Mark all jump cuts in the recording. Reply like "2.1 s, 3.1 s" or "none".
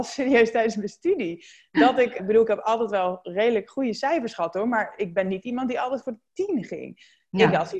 2.2 s

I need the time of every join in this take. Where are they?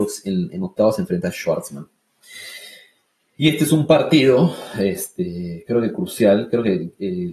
none

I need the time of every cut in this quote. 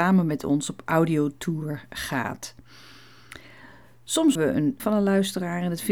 4.3 s, 4.8 s

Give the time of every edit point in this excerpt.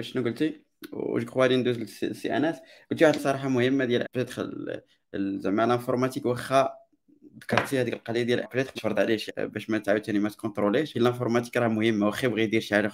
3.2 s, 4.0 s, 8.4 s, 8.8 s, 9.3 s, 10.9 s

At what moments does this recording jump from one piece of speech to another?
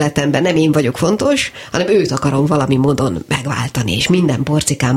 none

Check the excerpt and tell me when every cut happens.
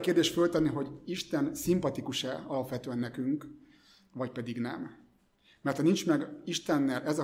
none

